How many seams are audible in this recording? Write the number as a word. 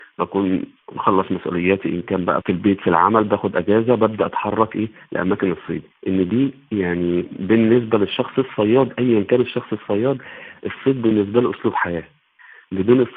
one